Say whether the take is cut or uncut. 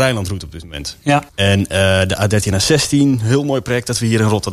cut